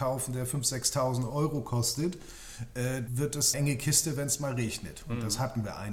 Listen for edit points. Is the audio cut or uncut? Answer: cut